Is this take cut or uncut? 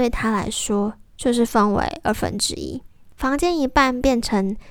uncut